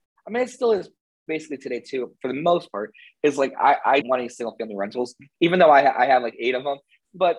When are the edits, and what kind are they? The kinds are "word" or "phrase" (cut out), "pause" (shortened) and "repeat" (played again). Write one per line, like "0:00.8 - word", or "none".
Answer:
0:04.0 - word